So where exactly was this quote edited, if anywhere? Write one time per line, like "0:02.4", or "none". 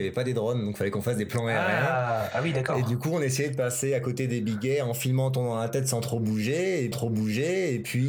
0:06.9

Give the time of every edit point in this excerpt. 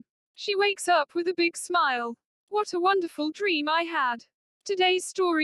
none

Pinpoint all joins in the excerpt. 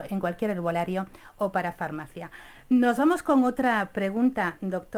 none

